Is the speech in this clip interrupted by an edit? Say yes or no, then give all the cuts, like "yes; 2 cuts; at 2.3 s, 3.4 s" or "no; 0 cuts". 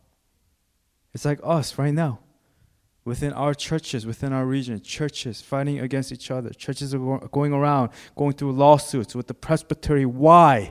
no; 0 cuts